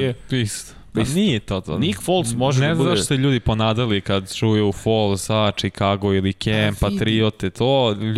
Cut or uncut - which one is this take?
uncut